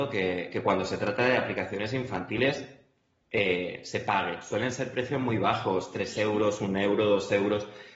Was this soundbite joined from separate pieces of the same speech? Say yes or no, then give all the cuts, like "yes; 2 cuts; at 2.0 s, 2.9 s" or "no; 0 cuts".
no; 0 cuts